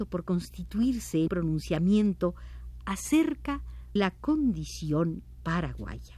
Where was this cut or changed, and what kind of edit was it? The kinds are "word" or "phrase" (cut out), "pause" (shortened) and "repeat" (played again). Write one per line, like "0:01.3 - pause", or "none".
0:01.3 - word
0:04.0 - word